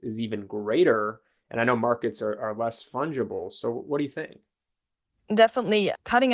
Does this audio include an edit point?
no; 0 cuts

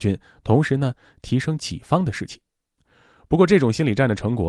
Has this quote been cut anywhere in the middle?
no; 0 cuts

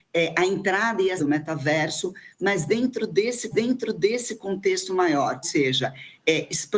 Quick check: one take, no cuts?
no; 3 cuts; at 1.2 s, 3.5 s, 5.4 s

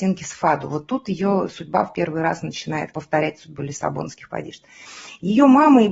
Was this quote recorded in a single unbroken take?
no; 2 cuts; at 2.9 s, 4.3 s

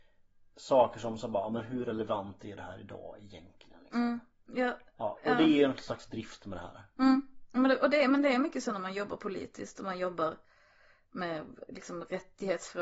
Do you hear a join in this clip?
no; 0 cuts

